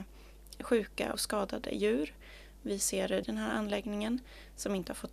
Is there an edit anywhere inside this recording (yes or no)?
yes